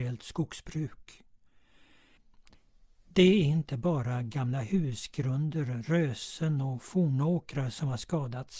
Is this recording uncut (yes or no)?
yes